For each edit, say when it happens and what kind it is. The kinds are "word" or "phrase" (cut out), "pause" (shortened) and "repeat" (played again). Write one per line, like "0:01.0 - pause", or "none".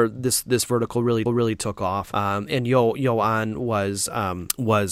0:01.3 - repeat